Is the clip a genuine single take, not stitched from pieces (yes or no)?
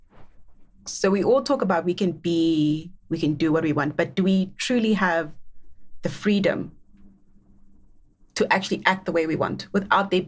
yes